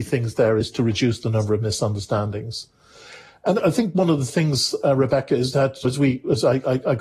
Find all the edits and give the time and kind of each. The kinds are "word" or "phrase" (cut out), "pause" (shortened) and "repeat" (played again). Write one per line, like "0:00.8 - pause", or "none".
none